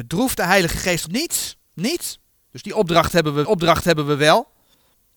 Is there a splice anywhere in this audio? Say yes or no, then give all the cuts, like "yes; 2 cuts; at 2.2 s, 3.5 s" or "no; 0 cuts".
yes; 2 cuts; at 1.1 s, 3.4 s